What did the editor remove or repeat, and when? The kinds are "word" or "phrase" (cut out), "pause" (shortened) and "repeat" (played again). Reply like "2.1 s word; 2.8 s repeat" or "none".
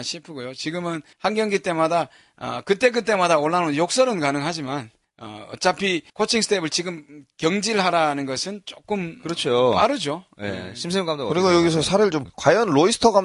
1.1 s pause; 5.0 s pause; 6.1 s pause; 12.2 s word